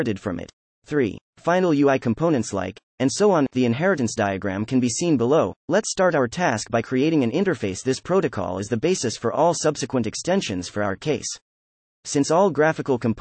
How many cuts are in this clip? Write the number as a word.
one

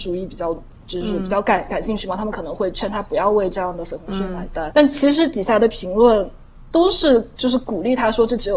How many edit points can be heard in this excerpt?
one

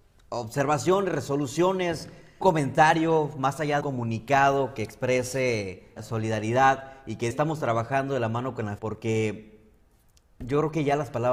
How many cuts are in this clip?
five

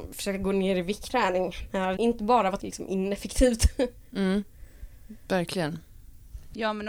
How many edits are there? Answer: three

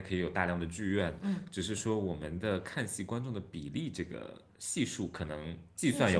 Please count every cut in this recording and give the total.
zero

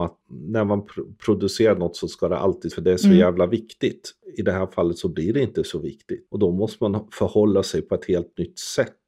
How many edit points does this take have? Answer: one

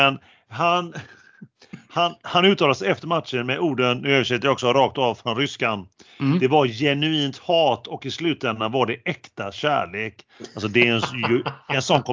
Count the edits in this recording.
zero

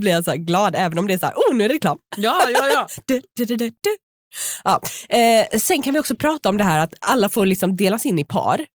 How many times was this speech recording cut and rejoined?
zero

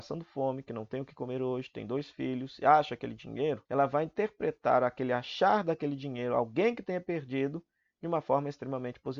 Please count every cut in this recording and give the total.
one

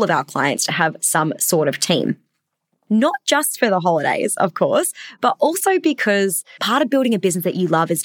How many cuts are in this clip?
zero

